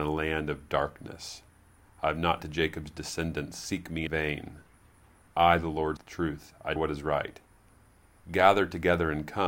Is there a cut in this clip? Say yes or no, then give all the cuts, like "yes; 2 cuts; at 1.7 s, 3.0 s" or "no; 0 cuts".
yes; 4 cuts; at 2.4 s, 4.1 s, 6.0 s, 6.8 s